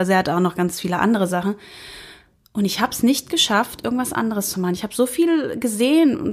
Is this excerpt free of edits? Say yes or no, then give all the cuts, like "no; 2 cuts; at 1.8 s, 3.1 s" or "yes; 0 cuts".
yes; 0 cuts